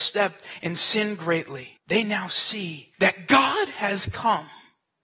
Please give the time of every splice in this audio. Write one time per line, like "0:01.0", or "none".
0:01.8
0:02.9